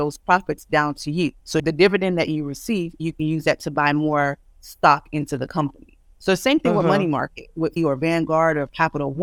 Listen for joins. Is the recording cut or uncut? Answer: cut